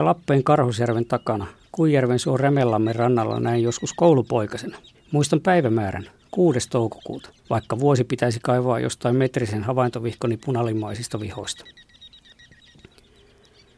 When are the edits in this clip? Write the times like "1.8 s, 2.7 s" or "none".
4.9 s, 7.4 s